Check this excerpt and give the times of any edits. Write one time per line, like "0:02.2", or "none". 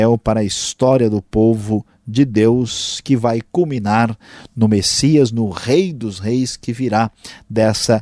none

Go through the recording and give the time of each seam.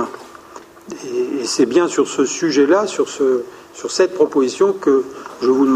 none

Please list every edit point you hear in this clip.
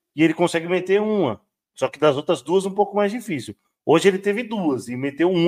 none

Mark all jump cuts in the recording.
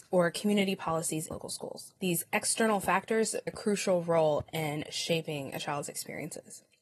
0:01.3
0:02.0
0:03.5

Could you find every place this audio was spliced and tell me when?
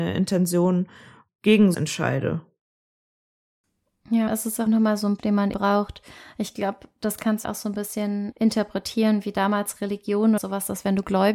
0:01.3
0:01.7
0:04.3
0:04.7
0:05.2
0:05.5
0:07.4
0:08.3
0:10.4

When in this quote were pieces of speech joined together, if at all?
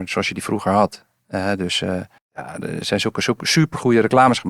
0:02.2

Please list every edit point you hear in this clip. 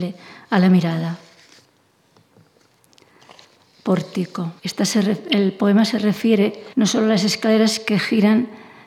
0:04.6
0:06.7

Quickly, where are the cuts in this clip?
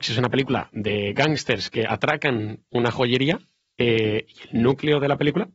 none

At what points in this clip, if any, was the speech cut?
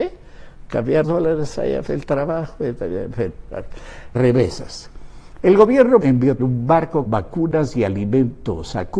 0:01.0
0:01.9
0:04.1
0:06.0
0:06.4
0:07.1

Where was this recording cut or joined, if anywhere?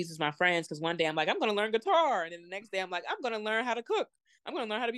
none

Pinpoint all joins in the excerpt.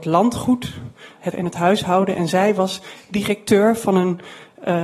0:01.3

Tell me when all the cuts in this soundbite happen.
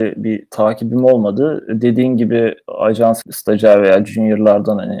0:03.2

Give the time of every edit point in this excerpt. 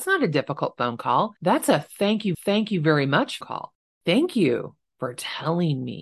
0:01.4
0:02.3
0:03.4

